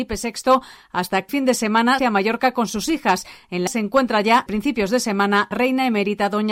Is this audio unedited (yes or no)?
no